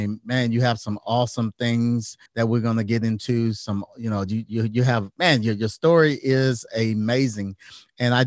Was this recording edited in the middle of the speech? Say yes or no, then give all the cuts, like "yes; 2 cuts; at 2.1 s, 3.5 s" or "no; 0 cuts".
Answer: yes; 1 cut; at 2.3 s